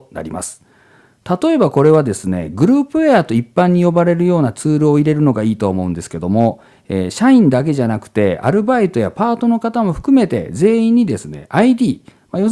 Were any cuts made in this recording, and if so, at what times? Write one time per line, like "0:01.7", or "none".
none